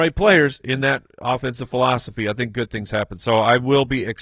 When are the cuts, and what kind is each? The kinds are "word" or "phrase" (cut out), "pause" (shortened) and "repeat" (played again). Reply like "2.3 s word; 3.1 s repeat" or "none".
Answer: none